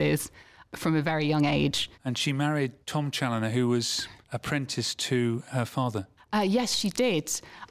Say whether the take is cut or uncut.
cut